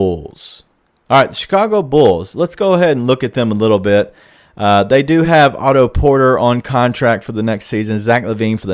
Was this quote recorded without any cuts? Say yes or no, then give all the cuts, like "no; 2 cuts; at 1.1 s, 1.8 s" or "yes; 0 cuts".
yes; 0 cuts